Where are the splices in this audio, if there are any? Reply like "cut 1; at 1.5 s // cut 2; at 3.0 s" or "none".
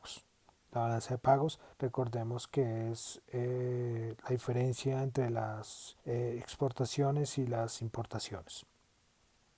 cut 1; at 1.7 s // cut 2; at 6.0 s